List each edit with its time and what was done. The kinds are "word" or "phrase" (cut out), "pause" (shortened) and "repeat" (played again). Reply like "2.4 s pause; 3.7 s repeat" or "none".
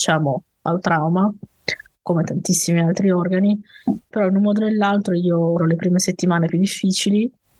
4.1 s word; 5.6 s word; 6.5 s phrase